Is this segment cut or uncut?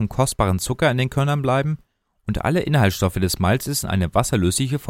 uncut